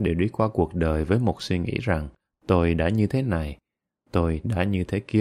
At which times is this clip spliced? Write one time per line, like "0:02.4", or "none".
none